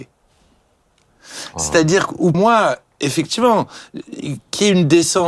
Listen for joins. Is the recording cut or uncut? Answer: cut